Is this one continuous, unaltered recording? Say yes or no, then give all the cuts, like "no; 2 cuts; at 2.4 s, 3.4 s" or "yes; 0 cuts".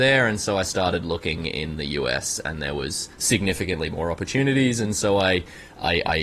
no; 1 cut; at 3.1 s